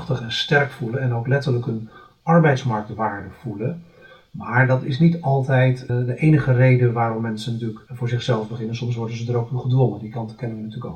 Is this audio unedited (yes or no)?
yes